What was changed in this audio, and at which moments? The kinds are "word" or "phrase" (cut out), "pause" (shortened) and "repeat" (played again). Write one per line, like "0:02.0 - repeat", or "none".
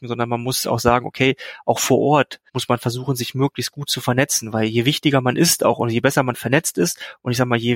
0:02.5 - pause